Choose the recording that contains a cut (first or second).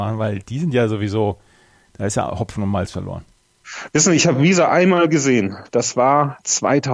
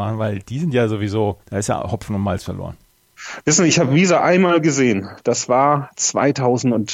second